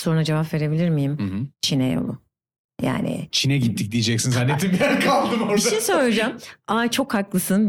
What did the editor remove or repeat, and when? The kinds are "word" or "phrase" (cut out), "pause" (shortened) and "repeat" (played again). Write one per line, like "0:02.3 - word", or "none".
none